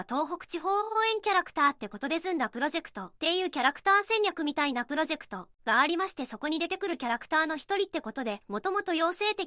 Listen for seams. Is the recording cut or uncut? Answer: cut